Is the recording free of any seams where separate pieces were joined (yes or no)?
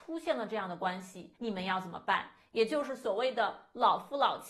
no